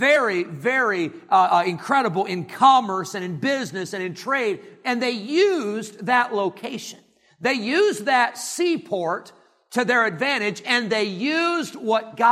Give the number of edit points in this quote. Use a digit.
0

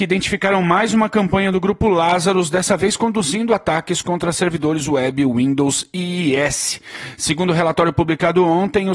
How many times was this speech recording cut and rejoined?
0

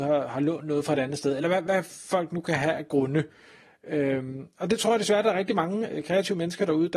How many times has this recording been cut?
0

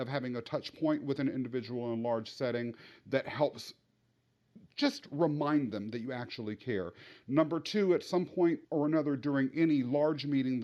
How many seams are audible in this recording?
1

